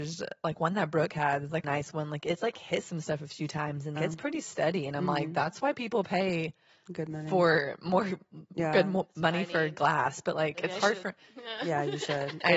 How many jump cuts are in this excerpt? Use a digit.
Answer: 2